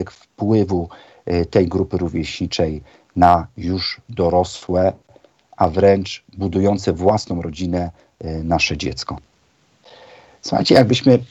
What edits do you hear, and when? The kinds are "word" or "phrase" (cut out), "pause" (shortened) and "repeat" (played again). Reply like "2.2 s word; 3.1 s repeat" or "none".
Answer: none

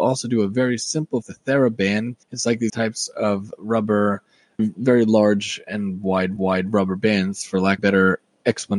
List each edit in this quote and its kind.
1.2 s word; 2.2 s pause; 2.7 s word; 4.6 s word; 6.4 s repeat; 7.8 s phrase

